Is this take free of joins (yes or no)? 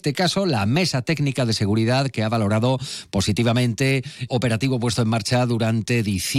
no